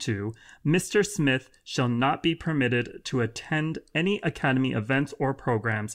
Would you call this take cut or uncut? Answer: uncut